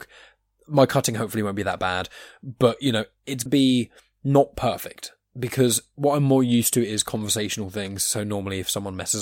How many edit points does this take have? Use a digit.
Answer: 1